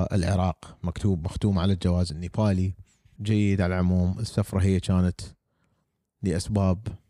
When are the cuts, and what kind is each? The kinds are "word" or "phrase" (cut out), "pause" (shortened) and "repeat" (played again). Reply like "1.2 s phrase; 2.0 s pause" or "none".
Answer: 3.2 s phrase